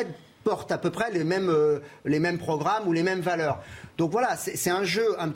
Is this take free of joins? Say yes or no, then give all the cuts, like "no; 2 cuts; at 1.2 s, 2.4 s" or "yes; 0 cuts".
yes; 0 cuts